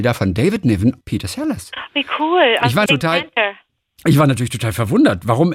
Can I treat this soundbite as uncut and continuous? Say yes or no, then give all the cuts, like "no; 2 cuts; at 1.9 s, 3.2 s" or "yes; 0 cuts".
no; 2 cuts; at 1.0 s, 2.9 s